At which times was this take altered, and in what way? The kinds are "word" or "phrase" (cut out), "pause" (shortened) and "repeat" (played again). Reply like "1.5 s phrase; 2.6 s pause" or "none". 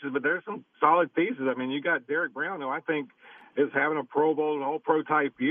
none